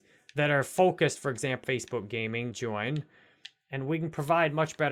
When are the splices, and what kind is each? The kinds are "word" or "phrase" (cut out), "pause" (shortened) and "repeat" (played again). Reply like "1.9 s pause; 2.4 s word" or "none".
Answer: 1.6 s word; 2.5 s word